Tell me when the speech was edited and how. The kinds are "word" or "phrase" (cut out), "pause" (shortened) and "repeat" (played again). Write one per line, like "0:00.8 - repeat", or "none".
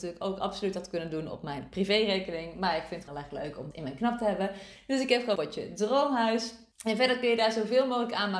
0:03.1 - word
0:03.7 - word
0:05.4 - word
0:06.7 - pause